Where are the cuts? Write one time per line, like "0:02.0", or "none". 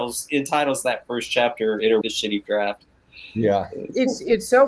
0:02.0
0:02.5